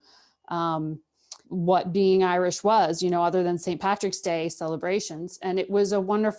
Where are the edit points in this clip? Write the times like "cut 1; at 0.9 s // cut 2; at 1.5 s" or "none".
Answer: cut 1; at 1.4 s

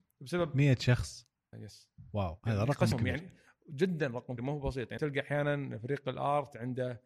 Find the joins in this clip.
cut 1; at 1.5 s // cut 2; at 2.4 s // cut 3; at 2.9 s // cut 4; at 4.4 s // cut 5; at 5.0 s

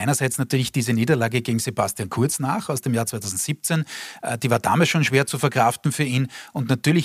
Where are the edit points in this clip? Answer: none

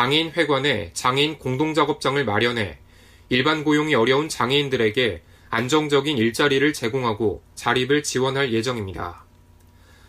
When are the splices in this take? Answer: none

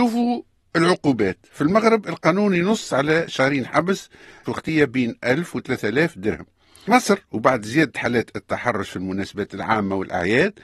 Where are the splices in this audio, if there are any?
cut 1; at 4.5 s // cut 2; at 6.9 s

